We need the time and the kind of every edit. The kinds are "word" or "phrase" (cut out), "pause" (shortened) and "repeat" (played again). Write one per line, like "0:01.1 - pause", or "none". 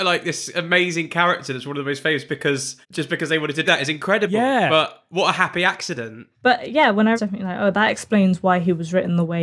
0:02.3 - word
0:02.8 - pause
0:03.7 - word
0:07.2 - phrase